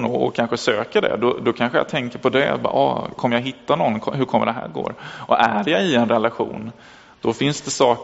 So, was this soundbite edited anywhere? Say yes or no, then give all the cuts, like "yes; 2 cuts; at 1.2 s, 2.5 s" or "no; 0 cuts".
no; 0 cuts